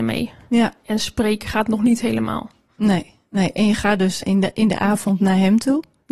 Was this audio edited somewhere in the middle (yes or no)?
yes